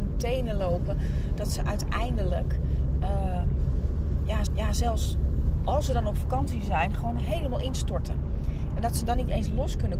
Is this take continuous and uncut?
no; 1 cut; at 4.5 s

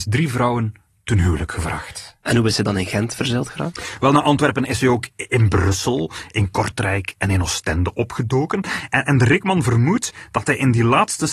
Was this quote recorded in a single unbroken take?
yes; 0 cuts

